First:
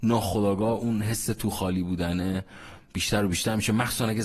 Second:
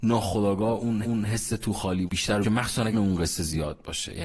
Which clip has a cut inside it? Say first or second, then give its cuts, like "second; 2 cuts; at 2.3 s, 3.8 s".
second; 4 cuts; at 1.0 s, 2.1 s, 2.4 s, 2.9 s